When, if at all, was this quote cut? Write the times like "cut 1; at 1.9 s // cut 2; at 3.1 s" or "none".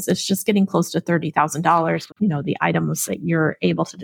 cut 1; at 2.1 s

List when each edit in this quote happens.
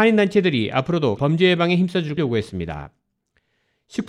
cut 1; at 1.2 s // cut 2; at 2.2 s

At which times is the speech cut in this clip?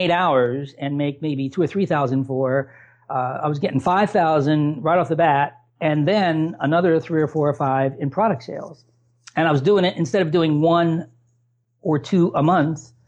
cut 1; at 5.7 s

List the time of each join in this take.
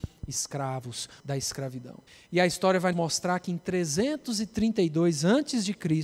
cut 1; at 1.2 s // cut 2; at 2.1 s // cut 3; at 2.9 s

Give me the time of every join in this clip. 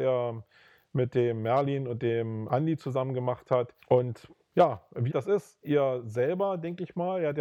cut 1; at 2.5 s // cut 2; at 3.8 s // cut 3; at 5.1 s // cut 4; at 5.6 s

